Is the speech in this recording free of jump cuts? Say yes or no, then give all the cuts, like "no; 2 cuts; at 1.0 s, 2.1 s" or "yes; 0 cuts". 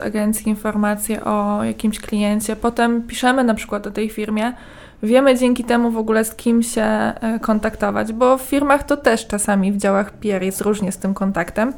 yes; 0 cuts